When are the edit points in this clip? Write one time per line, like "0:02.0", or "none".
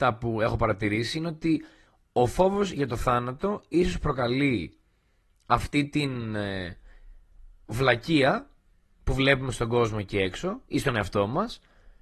none